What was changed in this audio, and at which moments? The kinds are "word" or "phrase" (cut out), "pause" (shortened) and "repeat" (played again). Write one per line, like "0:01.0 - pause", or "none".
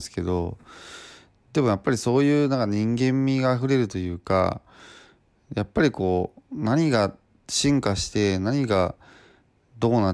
none